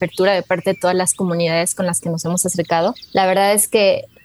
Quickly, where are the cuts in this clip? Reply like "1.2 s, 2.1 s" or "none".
none